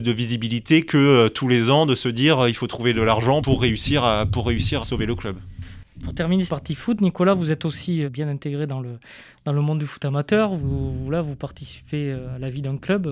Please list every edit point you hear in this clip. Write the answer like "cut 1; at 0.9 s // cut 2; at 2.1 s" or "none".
cut 1; at 3.4 s // cut 2; at 4.8 s // cut 3; at 6.5 s // cut 4; at 8.1 s